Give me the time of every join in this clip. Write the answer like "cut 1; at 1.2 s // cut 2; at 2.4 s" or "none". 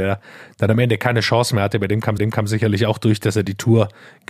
cut 1; at 2.2 s